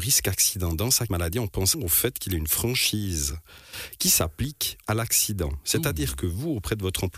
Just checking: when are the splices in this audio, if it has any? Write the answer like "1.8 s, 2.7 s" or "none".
1.1 s, 1.7 s, 4.8 s